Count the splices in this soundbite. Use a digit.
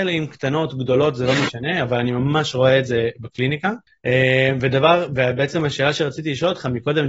0